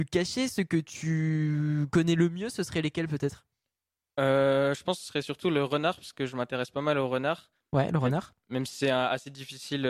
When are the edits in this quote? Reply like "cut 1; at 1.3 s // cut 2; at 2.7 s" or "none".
none